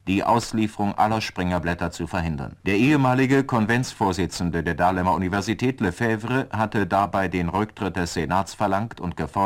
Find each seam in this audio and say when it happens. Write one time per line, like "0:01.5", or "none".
0:02.6